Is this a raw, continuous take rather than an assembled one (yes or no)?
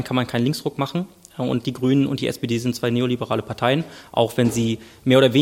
yes